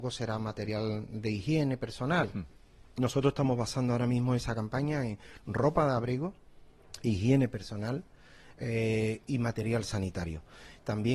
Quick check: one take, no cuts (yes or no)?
yes